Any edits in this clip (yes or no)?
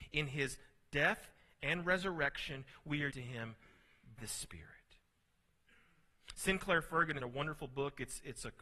yes